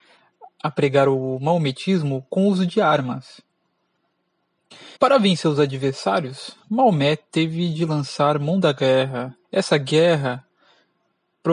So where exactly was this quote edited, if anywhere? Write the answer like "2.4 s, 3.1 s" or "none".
5.0 s, 9.4 s